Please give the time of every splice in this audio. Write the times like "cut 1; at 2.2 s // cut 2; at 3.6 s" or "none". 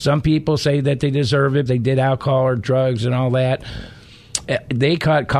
cut 1; at 1.7 s